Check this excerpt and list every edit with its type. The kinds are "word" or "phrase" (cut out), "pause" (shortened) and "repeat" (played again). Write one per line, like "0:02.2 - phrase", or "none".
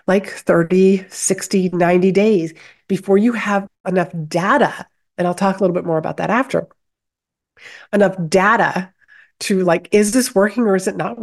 none